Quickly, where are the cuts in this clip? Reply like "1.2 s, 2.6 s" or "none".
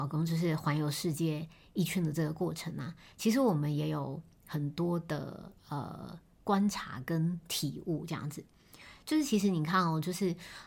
none